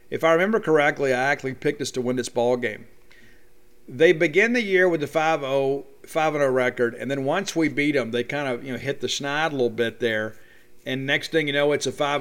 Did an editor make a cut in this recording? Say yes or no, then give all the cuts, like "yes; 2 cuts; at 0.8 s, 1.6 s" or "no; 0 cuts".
no; 0 cuts